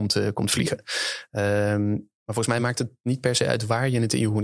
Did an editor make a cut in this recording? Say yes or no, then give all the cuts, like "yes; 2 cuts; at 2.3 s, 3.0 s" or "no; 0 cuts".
no; 0 cuts